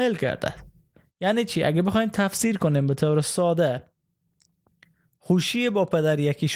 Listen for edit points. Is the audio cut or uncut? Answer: uncut